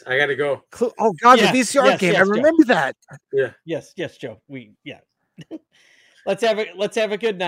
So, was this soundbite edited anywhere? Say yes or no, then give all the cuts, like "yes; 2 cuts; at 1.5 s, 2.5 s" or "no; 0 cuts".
no; 0 cuts